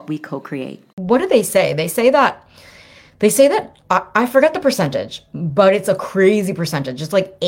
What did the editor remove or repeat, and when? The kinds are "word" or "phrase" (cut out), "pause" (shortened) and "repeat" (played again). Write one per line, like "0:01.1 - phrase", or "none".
0:00.9 - pause